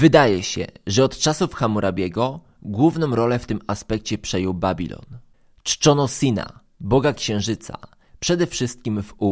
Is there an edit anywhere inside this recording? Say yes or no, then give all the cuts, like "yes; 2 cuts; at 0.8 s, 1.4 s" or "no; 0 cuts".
no; 0 cuts